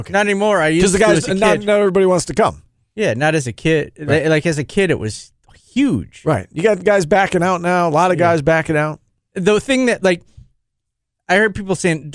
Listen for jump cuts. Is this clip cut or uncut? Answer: uncut